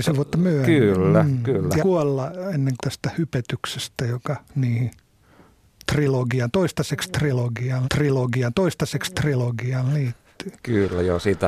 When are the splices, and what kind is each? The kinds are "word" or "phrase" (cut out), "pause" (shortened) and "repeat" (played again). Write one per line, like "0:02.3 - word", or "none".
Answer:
0:01.8 - word
0:02.8 - phrase
0:04.4 - pause
0:07.8 - repeat